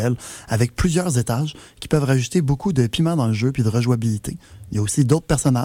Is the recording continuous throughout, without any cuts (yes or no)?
yes